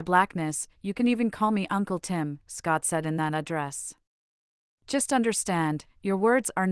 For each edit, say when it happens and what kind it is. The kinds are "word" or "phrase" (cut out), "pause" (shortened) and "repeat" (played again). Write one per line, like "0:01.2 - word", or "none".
none